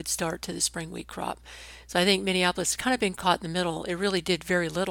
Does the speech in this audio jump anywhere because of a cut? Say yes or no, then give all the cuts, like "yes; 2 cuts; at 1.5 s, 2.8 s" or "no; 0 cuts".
no; 0 cuts